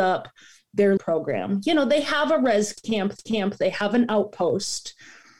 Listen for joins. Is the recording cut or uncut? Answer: cut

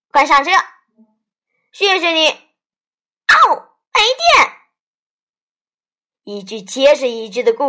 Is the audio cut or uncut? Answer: uncut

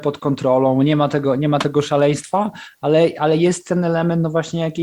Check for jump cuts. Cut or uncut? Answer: uncut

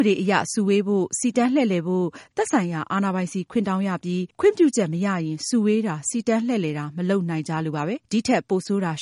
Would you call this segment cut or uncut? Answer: cut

